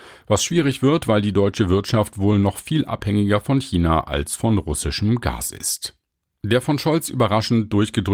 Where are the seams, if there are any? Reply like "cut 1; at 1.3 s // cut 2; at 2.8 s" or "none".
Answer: none